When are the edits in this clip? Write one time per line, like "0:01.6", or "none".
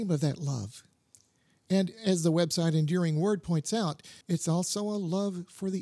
0:04.2